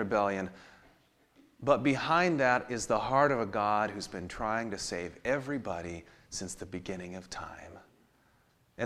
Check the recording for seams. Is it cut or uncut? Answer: uncut